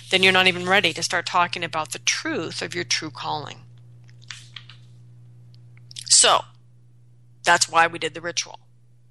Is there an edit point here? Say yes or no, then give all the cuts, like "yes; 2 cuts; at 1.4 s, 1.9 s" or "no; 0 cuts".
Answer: no; 0 cuts